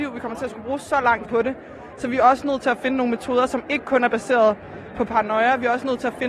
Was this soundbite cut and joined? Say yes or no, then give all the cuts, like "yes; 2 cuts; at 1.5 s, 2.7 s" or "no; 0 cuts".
yes; 1 cut; at 1.2 s